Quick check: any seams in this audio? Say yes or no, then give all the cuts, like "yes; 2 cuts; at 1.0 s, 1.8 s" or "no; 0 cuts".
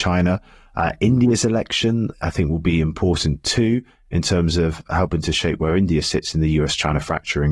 no; 0 cuts